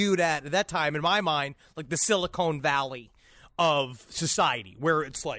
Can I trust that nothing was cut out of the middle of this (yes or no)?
yes